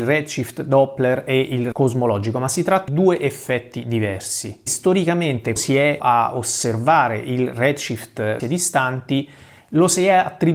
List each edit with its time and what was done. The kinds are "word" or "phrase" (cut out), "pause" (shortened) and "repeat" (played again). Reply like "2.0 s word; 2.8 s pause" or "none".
1.7 s word; 2.9 s word; 5.6 s word; 6.0 s word; 8.4 s phrase